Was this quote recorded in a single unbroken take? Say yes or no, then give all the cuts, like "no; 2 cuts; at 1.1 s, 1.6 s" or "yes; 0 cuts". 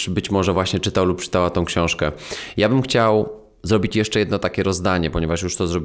yes; 0 cuts